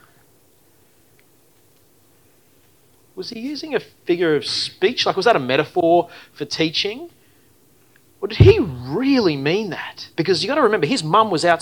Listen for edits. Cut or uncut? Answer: cut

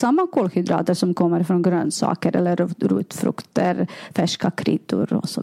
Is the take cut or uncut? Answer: uncut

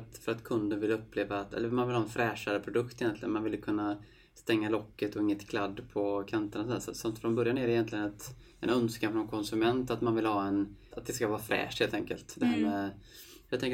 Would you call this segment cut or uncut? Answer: cut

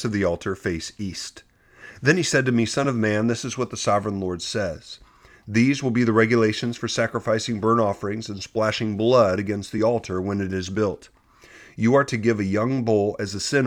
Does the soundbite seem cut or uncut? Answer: uncut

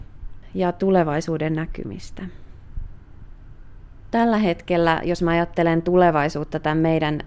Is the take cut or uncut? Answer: uncut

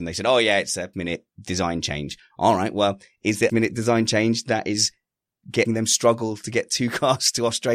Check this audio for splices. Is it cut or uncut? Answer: cut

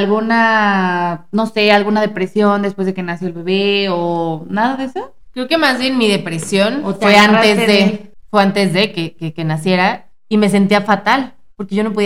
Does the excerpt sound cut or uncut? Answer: uncut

